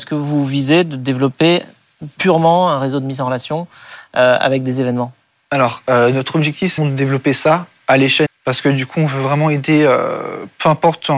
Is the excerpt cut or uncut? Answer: cut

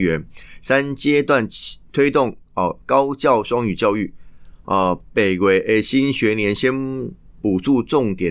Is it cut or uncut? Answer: cut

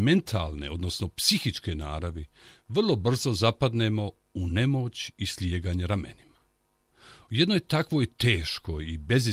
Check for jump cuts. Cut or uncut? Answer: uncut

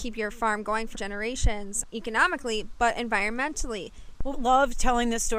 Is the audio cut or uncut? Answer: cut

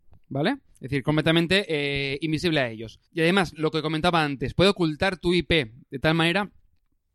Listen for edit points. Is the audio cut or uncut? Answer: cut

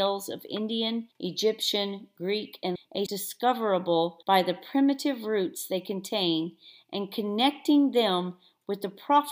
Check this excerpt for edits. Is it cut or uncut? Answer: cut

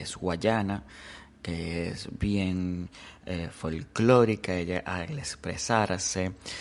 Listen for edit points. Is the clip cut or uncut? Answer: uncut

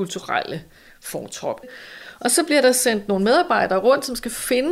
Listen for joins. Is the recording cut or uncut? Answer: uncut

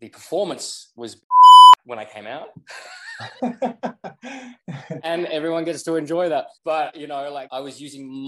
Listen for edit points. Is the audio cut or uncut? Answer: cut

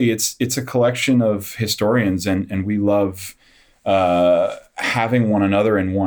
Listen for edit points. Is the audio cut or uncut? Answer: uncut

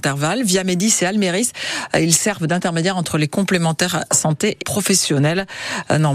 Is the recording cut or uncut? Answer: cut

